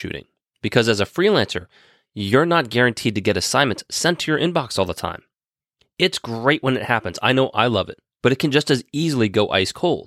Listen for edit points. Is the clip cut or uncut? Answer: uncut